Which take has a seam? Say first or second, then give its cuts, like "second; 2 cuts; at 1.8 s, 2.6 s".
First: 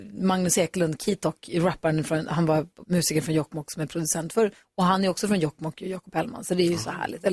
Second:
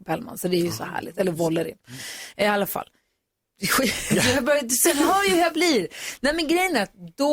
first; 1 cut; at 2.8 s